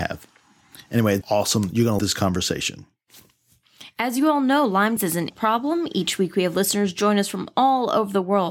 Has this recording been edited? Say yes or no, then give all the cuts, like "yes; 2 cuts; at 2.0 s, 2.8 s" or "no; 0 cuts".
yes; 4 cuts; at 1.2 s, 2.0 s, 5.0 s, 5.3 s